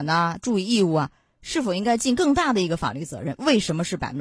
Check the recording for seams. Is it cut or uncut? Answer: uncut